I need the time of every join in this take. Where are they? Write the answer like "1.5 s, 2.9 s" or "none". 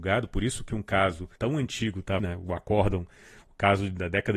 1.4 s, 2.2 s